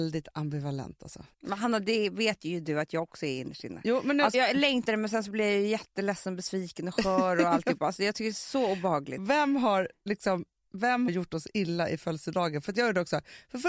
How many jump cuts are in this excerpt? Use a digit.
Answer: 4